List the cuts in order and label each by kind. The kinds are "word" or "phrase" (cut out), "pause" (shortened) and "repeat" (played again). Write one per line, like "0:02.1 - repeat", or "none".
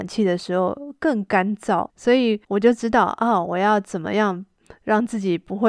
0:01.9 - pause
0:02.4 - pause